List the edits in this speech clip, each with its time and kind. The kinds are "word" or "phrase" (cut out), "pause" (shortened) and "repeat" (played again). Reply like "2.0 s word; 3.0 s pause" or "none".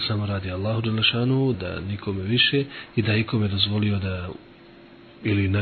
1.5 s word